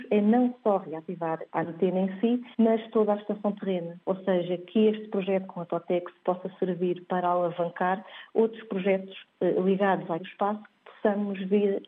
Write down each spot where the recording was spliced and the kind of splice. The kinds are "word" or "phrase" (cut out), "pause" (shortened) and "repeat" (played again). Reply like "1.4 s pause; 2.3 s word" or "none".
2.5 s pause; 4.0 s pause; 10.2 s word

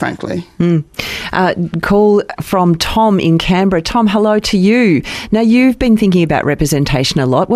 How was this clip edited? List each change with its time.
none

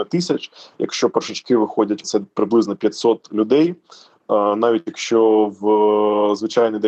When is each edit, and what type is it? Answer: 2.0 s word

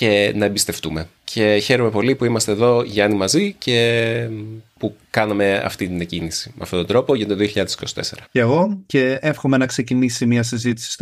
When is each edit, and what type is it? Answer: 1.2 s pause; 8.3 s pause

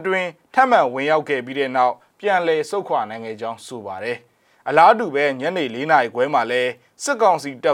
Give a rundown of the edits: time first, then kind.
none

